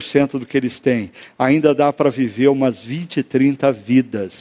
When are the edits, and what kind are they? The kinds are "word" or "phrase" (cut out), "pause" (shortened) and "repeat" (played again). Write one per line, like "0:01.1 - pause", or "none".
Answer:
none